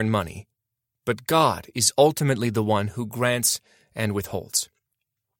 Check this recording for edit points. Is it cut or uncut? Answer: uncut